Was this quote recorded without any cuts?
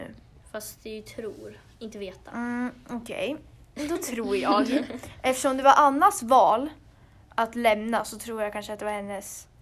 yes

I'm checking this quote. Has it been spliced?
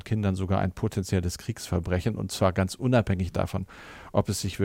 no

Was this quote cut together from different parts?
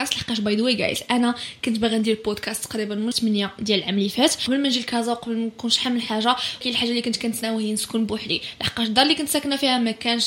yes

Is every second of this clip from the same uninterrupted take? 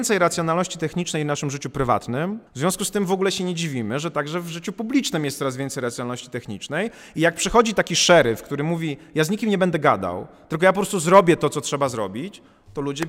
no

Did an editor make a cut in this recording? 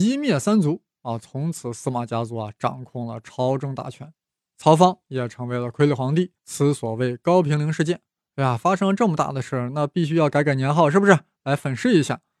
yes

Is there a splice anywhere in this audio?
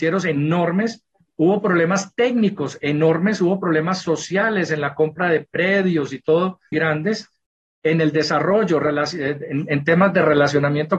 yes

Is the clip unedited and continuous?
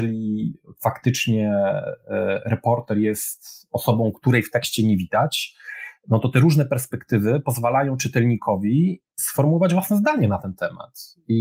yes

